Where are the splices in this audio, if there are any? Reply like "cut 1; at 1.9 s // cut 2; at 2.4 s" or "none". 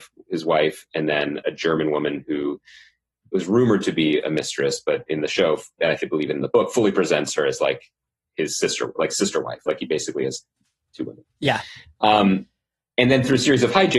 none